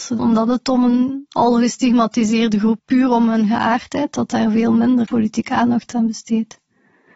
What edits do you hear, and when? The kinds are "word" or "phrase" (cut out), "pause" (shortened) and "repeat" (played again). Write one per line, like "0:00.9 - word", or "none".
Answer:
0:02.8 - word
0:05.1 - word
0:05.9 - word